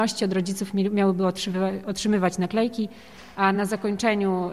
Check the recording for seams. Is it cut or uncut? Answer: uncut